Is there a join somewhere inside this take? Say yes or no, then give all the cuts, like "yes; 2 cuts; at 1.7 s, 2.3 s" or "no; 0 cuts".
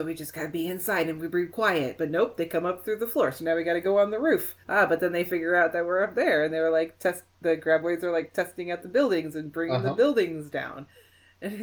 yes; 1 cut; at 4.6 s